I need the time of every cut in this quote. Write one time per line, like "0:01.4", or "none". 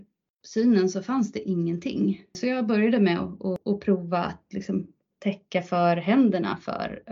none